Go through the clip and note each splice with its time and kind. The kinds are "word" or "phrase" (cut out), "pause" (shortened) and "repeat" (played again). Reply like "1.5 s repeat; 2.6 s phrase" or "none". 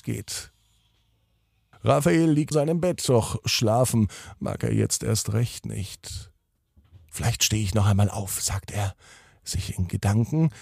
2.5 s word